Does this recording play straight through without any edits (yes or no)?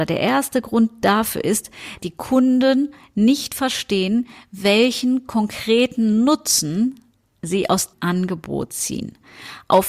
no